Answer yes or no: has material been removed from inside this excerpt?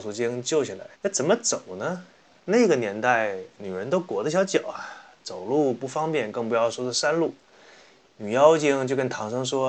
yes